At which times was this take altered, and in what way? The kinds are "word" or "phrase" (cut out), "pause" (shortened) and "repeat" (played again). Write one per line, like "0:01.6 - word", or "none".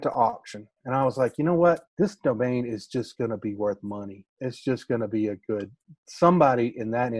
0:01.9 - pause